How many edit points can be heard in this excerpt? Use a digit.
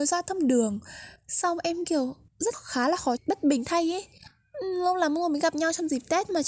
2